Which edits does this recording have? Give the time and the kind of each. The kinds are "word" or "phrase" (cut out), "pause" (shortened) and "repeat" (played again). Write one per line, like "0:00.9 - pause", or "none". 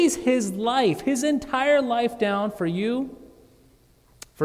none

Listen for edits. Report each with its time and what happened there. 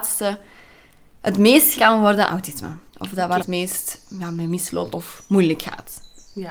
0:01.7 - word
0:02.3 - word
0:02.9 - pause
0:03.4 - phrase
0:04.9 - word

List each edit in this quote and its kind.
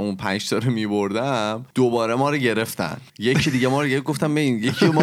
0:01.7 - pause
0:03.1 - pause

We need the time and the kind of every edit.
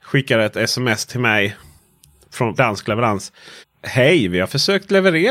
0:02.6 - word
0:03.6 - pause

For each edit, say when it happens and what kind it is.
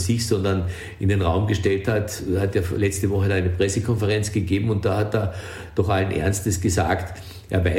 none

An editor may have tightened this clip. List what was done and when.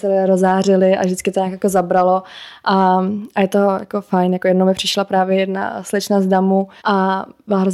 0:06.8 - pause

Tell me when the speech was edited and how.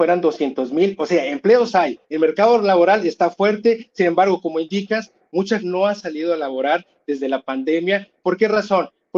0:02.0 - pause
0:05.6 - word

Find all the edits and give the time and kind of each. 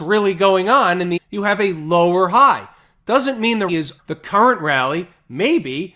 0:01.2 - word
0:03.7 - word
0:04.0 - word

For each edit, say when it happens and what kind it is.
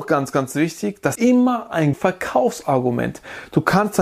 0:01.1 - word
0:01.9 - word

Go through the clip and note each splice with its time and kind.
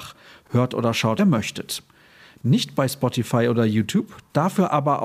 0:01.2 - phrase

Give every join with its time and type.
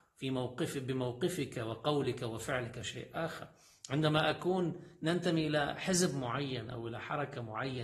none

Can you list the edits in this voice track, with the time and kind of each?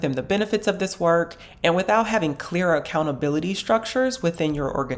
none

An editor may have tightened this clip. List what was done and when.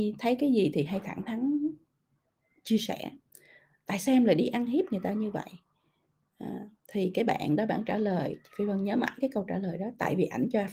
none

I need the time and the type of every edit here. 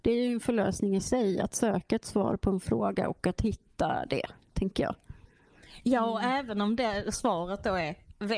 none

